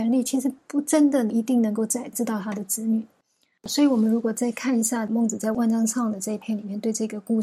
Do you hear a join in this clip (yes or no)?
no